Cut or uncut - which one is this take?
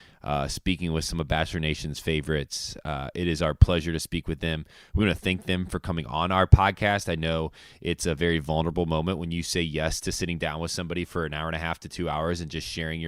uncut